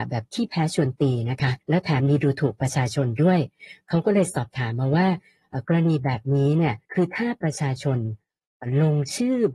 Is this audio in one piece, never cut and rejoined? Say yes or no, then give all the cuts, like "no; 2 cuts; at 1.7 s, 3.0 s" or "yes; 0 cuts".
no; 2 cuts; at 1.6 s, 6.8 s